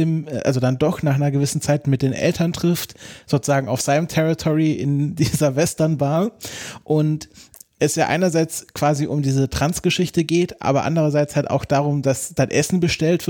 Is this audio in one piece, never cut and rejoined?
yes; 0 cuts

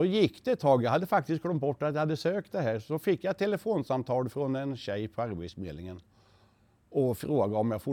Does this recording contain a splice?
no; 0 cuts

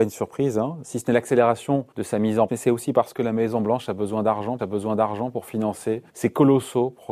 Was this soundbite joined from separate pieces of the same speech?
yes; 4 cuts; at 1.9 s, 2.5 s, 4.6 s, 6.1 s

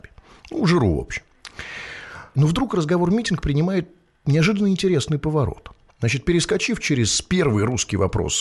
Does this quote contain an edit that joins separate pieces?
no; 0 cuts

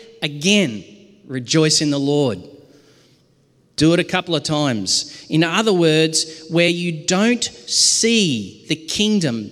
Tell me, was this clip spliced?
no; 0 cuts

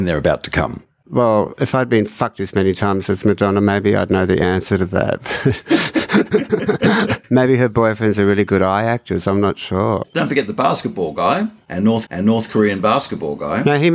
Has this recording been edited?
yes; 1 cut; at 12.1 s

